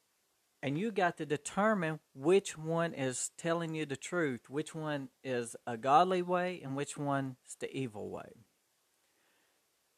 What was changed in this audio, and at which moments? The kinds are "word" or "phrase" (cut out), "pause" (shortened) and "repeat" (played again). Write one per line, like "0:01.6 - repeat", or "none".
none